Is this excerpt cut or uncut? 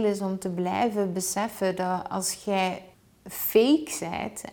cut